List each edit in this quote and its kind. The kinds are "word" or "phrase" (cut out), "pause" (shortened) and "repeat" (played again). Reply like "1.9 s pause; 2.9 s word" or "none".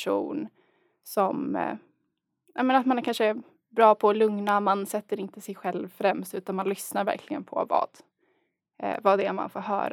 none